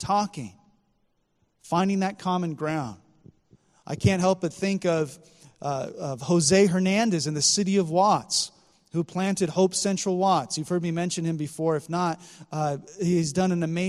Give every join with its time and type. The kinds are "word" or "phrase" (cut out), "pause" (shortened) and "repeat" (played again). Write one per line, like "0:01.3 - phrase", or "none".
none